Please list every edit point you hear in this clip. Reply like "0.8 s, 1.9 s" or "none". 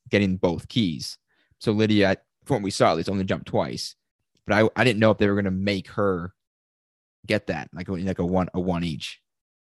none